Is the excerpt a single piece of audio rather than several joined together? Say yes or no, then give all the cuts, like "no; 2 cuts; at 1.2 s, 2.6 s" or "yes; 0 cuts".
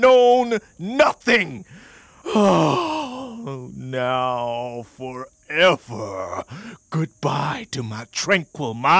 yes; 0 cuts